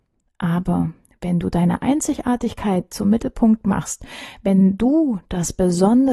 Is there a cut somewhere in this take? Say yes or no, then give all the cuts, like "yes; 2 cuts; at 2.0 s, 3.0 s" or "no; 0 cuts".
no; 0 cuts